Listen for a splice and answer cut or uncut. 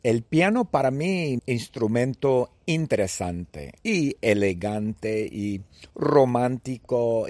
cut